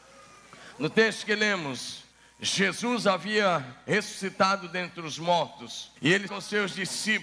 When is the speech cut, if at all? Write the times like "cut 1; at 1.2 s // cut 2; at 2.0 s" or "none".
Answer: cut 1; at 2.1 s // cut 2; at 6.0 s // cut 3; at 6.3 s